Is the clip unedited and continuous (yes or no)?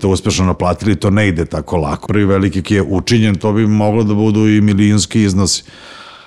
no